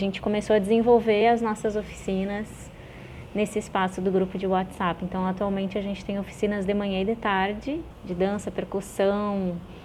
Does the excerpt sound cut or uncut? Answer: uncut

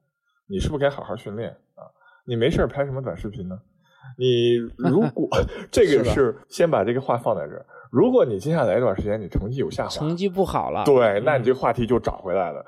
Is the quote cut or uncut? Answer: cut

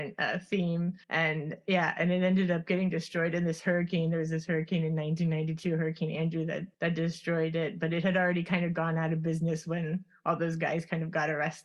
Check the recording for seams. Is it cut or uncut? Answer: cut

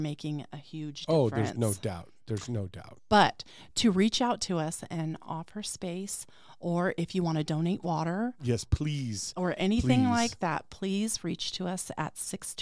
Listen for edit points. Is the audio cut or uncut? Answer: uncut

